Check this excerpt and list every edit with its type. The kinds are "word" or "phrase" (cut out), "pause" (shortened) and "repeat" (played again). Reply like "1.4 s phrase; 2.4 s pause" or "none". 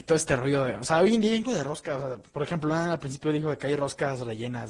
1.4 s word